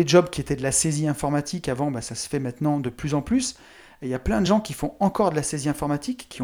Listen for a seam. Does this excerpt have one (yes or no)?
no